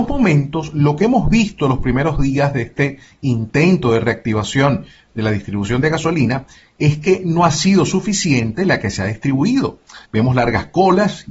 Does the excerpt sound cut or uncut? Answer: cut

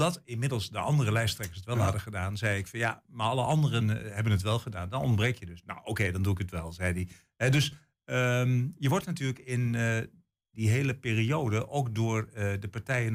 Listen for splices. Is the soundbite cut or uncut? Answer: uncut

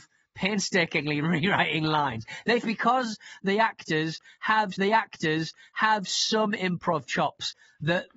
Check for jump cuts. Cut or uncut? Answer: cut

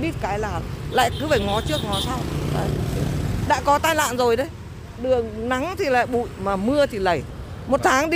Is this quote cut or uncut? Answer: uncut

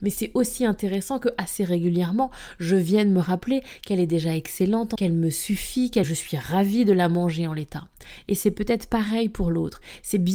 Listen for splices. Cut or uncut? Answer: cut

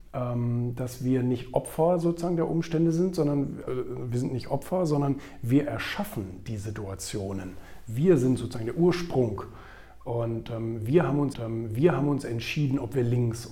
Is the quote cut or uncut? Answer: cut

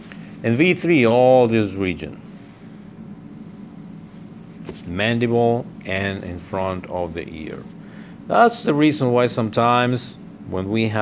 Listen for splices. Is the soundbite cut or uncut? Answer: uncut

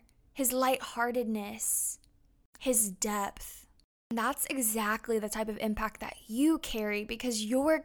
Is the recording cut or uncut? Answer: uncut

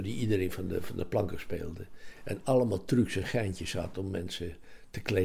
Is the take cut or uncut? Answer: uncut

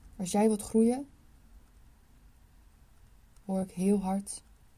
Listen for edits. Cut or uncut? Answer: uncut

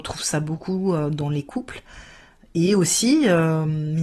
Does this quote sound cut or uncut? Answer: uncut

